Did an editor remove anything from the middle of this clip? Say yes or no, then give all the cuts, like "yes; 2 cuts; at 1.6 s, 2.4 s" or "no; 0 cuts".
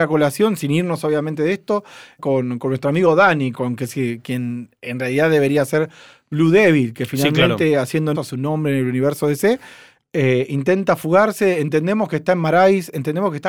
yes; 3 cuts; at 2.2 s, 3.5 s, 8.1 s